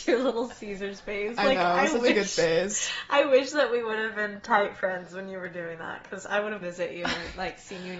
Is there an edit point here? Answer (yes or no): yes